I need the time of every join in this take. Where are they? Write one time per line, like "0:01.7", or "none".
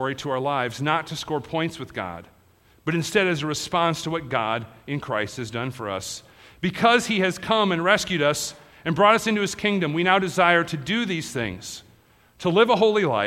none